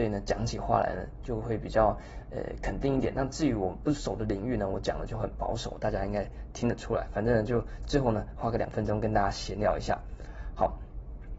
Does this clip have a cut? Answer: no; 0 cuts

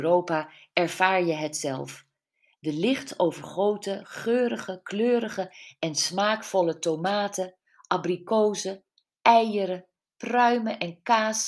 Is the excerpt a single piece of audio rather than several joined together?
yes; 0 cuts

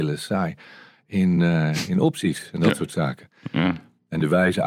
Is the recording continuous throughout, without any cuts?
yes; 0 cuts

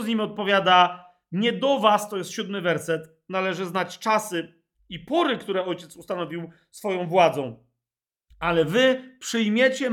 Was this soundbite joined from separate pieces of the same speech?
no; 0 cuts

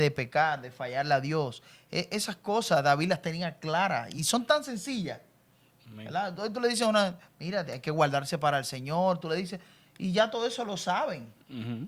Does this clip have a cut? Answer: no; 0 cuts

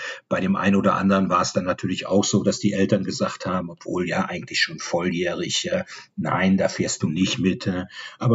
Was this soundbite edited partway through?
no; 0 cuts

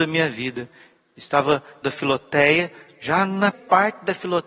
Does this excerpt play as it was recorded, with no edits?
no; 2 cuts; at 1.8 s, 3.5 s

